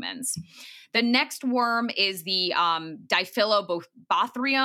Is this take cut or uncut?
uncut